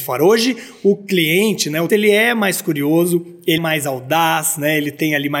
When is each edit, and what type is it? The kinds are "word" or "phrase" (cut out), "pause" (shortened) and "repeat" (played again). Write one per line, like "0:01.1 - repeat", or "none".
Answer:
0:01.9 - word
0:03.6 - word